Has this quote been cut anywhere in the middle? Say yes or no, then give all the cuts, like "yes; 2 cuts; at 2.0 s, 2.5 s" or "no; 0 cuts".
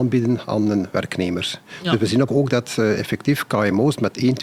yes; 1 cut; at 2.3 s